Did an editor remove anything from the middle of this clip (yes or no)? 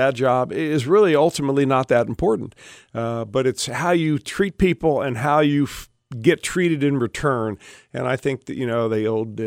no